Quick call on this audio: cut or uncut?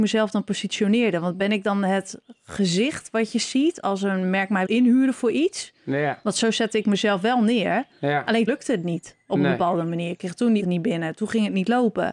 cut